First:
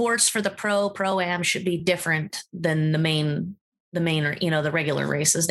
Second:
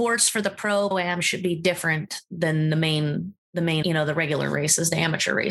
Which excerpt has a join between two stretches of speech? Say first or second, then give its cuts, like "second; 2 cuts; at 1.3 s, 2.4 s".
second; 3 cuts; at 0.9 s, 3.4 s, 3.8 s